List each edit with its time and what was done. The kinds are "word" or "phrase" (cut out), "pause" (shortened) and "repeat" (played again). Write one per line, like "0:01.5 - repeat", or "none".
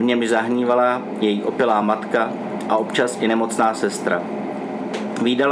none